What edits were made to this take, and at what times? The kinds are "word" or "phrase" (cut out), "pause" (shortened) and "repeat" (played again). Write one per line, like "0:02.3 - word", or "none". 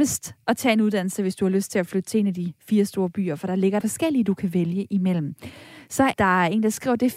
0:03.8 - word
0:06.1 - word